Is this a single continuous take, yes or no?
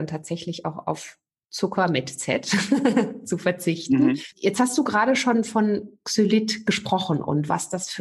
yes